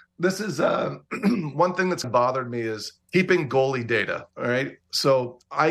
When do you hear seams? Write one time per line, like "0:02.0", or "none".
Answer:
0:02.0
0:03.0
0:04.3